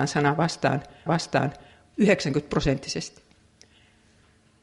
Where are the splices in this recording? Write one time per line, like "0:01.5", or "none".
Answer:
0:01.1